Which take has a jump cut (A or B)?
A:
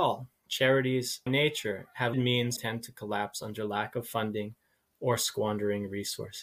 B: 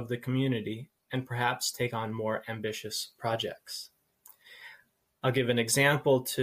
A